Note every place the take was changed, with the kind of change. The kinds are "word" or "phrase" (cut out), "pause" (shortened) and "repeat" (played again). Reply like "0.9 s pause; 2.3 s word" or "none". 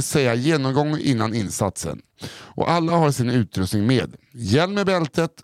none

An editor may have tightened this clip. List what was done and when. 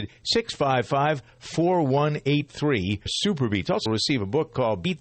3.1 s word; 3.9 s word

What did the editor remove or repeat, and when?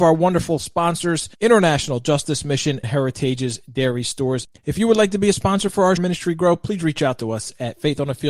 1.3 s pause; 2.8 s word; 4.6 s pause; 6.0 s phrase

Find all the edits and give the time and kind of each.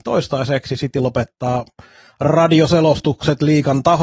none

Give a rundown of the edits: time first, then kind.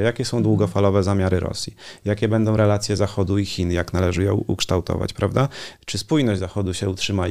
none

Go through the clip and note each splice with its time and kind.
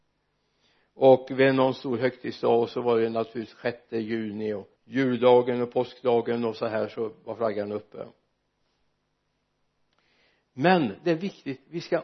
4.8 s pause

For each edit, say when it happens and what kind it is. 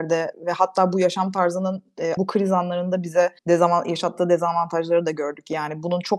2.2 s word; 3.4 s pause

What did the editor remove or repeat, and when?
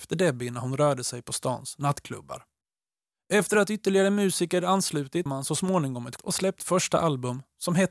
5.3 s word; 6.2 s word; 6.6 s word

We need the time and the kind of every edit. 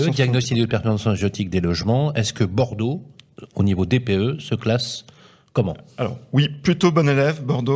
none

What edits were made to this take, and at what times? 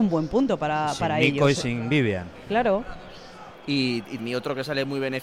3.5 s pause; 4.2 s phrase

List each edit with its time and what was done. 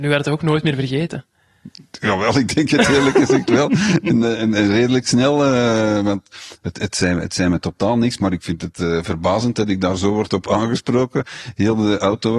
none

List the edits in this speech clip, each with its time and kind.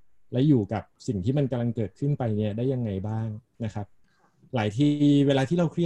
none

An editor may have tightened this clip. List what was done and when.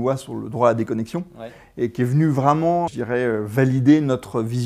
2.9 s phrase

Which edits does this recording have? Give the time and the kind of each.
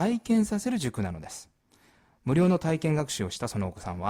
none

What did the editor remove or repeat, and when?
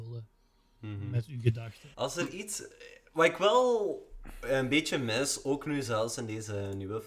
1.9 s pause

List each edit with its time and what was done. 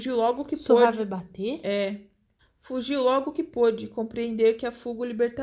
2.4 s pause

